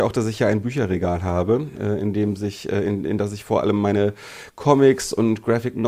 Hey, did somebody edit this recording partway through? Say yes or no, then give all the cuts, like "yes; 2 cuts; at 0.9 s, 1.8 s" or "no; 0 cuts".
no; 0 cuts